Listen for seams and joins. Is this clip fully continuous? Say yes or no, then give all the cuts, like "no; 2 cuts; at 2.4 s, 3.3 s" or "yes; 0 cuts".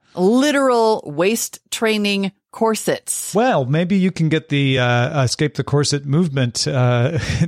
yes; 0 cuts